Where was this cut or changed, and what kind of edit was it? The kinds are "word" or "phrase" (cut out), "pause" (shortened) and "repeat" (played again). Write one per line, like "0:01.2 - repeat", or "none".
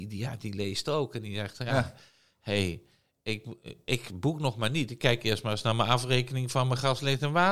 none